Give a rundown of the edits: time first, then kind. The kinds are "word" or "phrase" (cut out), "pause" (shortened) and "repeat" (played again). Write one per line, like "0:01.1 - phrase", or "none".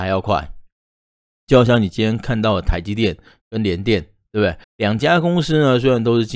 0:04.6 - pause